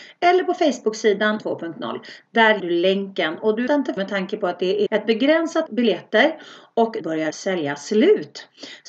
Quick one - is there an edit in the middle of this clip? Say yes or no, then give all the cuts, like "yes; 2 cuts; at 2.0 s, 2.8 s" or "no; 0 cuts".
yes; 8 cuts; at 1.4 s, 2.6 s, 3.7 s, 4.0 s, 4.9 s, 5.7 s, 7.0 s, 7.3 s